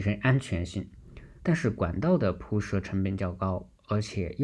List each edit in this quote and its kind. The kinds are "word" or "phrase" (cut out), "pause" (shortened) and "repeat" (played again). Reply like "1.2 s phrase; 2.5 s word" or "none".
1.4 s pause